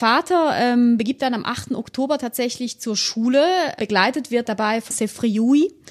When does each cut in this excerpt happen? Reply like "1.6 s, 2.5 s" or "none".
1.2 s, 4.5 s, 4.9 s